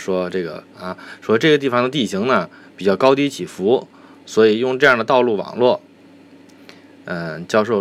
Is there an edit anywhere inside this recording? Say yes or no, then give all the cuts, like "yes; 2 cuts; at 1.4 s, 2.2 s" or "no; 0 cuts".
no; 0 cuts